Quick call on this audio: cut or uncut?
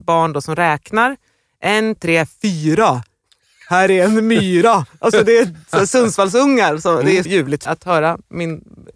cut